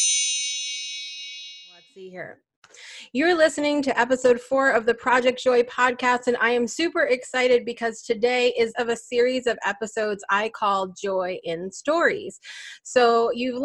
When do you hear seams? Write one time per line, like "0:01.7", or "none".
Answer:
0:08.7